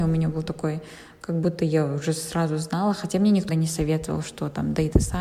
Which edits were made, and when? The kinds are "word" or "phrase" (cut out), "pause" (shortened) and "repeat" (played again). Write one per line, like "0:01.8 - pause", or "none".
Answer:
0:03.5 - word